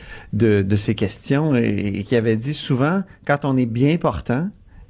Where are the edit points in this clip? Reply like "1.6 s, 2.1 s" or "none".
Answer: none